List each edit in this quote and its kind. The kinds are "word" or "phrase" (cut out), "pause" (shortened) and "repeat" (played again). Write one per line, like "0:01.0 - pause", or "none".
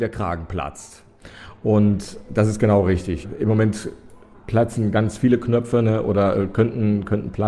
none